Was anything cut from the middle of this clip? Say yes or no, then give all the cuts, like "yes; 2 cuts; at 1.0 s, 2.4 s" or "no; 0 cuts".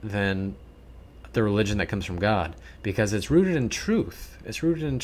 no; 0 cuts